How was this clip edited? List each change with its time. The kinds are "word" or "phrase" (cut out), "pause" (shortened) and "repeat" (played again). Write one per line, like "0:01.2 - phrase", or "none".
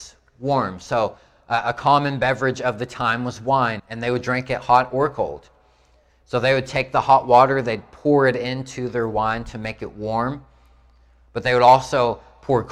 0:03.8 - word